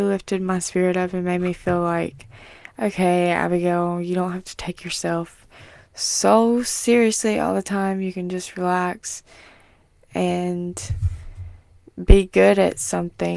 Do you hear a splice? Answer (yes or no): no